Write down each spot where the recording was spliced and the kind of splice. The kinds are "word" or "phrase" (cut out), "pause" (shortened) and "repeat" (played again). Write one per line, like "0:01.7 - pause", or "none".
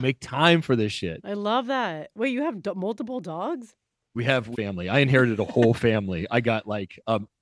0:04.5 - phrase